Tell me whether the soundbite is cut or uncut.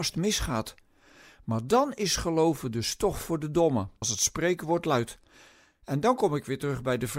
cut